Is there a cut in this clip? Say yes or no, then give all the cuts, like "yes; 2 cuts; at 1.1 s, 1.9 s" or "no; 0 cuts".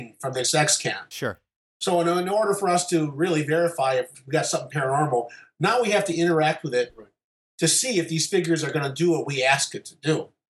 no; 0 cuts